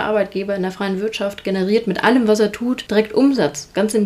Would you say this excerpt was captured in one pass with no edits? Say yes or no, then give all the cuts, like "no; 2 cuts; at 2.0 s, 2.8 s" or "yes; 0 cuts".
yes; 0 cuts